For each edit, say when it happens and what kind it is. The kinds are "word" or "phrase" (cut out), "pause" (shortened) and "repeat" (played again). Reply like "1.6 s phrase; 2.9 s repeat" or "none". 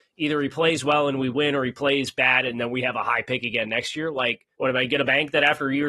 4.5 s pause

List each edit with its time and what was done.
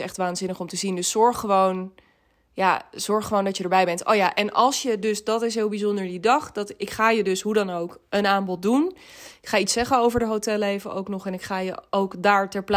none

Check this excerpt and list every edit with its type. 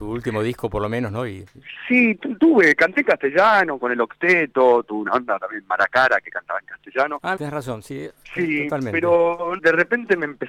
7.4 s word; 9.6 s word

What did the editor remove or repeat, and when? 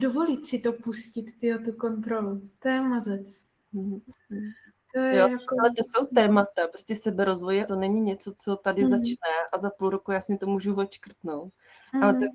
7.7 s word

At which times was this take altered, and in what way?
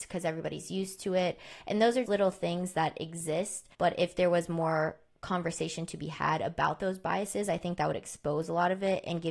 2.1 s word; 3.7 s pause

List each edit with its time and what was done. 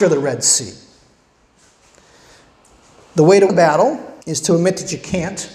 3.5 s word; 4.2 s pause

